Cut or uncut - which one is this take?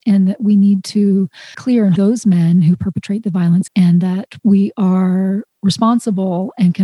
cut